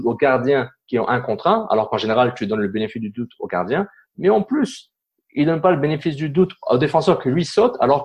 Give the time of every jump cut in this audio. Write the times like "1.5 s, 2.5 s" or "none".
none

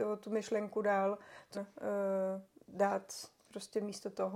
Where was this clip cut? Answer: 1.5 s, 3.4 s

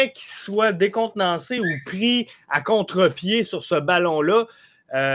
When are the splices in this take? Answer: none

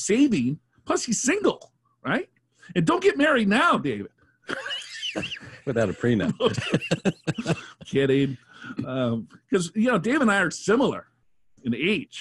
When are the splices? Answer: none

